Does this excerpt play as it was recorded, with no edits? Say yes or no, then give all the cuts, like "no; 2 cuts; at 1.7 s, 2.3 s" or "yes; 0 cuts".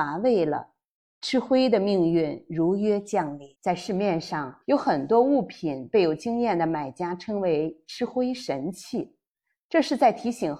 no; 2 cuts; at 3.5 s, 4.6 s